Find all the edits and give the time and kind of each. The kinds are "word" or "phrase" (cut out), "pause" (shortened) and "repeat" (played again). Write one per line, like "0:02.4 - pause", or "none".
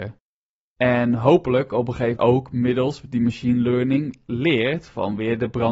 0:02.2 - word

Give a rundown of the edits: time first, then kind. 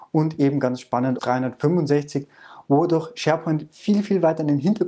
0:01.2 - word

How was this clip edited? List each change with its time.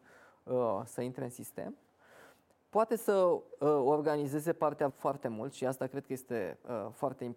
0:04.9 - word

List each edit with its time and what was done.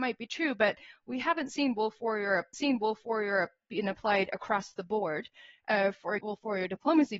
0:02.5 - repeat
0:06.2 - word

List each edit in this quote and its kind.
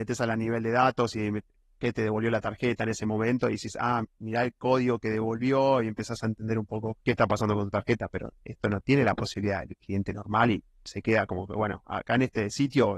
0:04.0 - word
0:07.0 - pause

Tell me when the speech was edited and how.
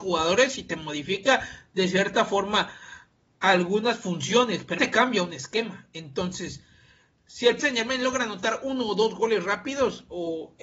0:04.8 - word
0:07.6 - word

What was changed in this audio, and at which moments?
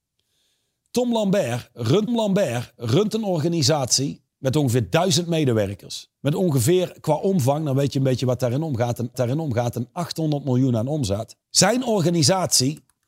0:02.1 - repeat
0:04.3 - pause
0:06.1 - pause
0:09.1 - repeat
0:11.4 - pause

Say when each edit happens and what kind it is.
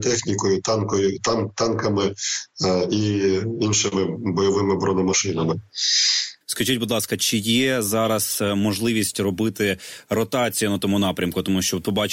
0:06.4 - pause

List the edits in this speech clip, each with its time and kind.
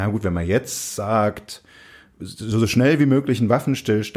none

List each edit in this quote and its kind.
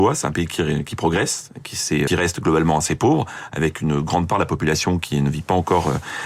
0:02.1 - phrase

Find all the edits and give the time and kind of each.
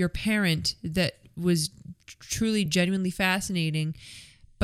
none

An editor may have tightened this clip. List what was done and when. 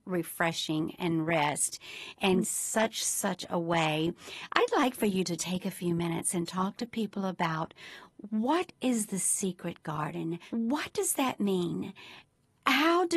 0:02.4 - phrase
0:05.4 - word

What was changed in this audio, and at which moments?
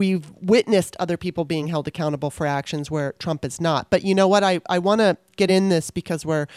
none

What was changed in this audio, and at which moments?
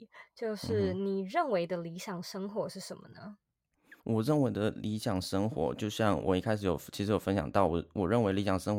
0:04.0 - pause

